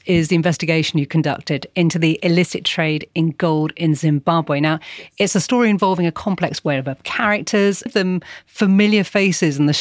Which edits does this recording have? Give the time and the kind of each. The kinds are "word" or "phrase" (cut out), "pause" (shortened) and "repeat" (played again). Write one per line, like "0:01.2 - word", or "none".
0:07.9 - word